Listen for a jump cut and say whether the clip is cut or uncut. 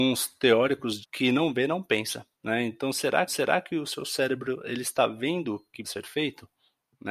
cut